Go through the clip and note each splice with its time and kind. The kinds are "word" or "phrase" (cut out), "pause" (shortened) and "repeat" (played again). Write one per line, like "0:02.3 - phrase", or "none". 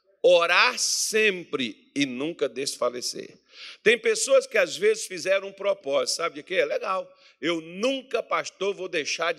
none